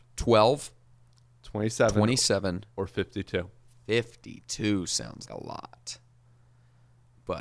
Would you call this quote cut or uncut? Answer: cut